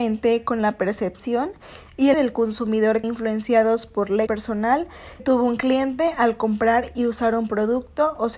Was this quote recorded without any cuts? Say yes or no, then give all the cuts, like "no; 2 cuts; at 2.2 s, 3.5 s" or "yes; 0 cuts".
no; 4 cuts; at 2.1 s, 3.0 s, 4.3 s, 5.2 s